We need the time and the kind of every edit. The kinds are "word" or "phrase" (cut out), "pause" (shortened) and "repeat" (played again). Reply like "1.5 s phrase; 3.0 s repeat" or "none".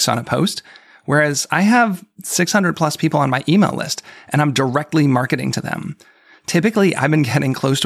none